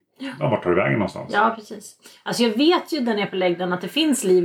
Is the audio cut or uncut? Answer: uncut